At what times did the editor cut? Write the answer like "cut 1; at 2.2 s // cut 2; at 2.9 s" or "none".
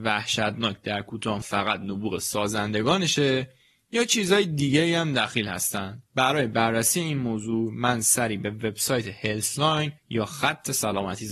cut 1; at 1.4 s // cut 2; at 6.1 s // cut 3; at 10.0 s